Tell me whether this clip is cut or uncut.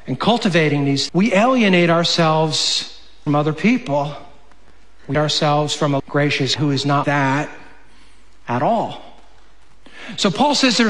cut